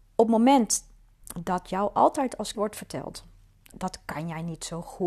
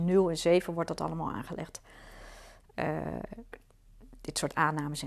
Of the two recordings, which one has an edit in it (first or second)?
first